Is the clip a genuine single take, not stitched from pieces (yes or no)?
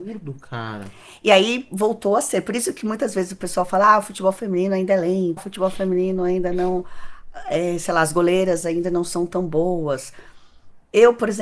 no